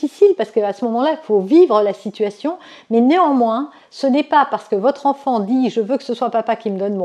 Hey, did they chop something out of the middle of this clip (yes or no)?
no